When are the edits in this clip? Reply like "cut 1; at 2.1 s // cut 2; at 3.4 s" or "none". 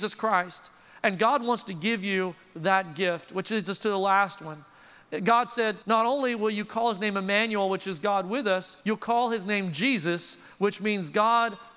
cut 1; at 5.8 s // cut 2; at 8.8 s